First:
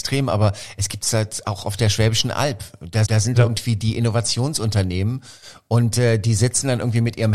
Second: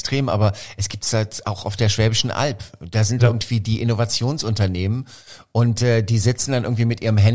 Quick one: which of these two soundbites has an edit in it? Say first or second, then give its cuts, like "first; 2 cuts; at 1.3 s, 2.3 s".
first; 1 cut; at 3.1 s